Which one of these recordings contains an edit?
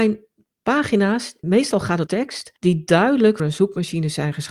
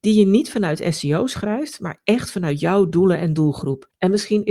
first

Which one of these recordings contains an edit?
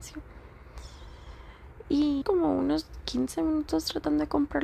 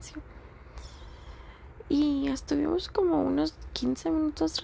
first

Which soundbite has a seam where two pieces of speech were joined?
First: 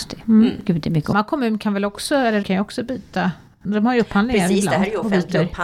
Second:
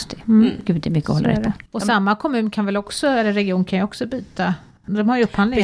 first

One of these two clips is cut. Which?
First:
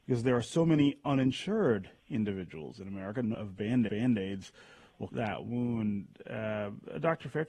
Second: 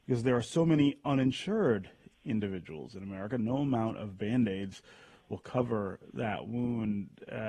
first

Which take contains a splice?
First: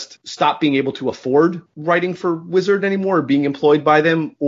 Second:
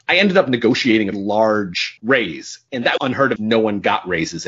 second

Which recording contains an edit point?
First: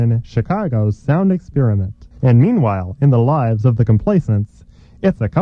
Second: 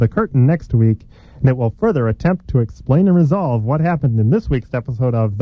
first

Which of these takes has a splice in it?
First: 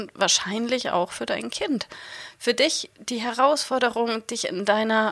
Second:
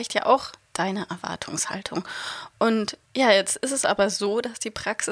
second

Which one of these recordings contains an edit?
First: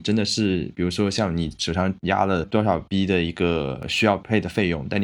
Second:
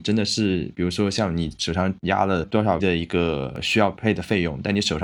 second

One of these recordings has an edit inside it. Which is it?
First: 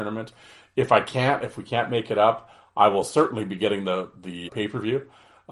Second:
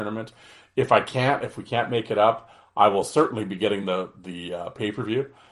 first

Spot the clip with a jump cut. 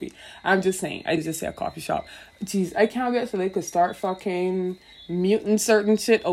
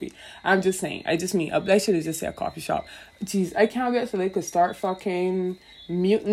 first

